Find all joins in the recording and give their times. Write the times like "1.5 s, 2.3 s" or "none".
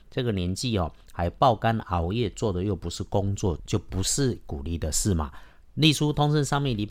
none